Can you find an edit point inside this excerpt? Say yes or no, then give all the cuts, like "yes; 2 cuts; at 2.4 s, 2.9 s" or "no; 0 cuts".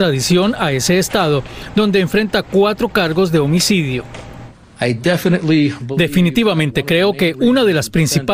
no; 0 cuts